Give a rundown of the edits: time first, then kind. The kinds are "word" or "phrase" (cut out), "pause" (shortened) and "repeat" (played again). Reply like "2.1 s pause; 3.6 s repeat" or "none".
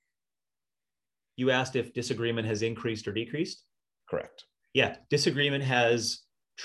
none